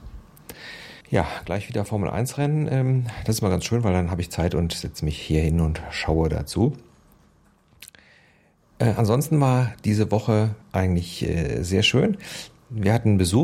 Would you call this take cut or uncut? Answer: cut